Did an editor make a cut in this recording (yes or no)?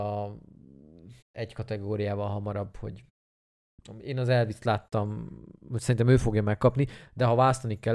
yes